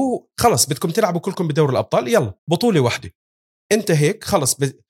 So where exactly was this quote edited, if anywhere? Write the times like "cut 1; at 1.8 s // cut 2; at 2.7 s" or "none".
cut 1; at 2.4 s